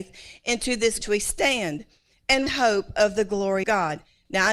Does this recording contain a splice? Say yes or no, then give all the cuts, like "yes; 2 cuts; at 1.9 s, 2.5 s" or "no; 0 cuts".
yes; 3 cuts; at 1.0 s, 2.5 s, 3.6 s